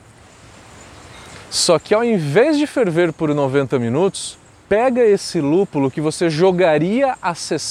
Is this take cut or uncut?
cut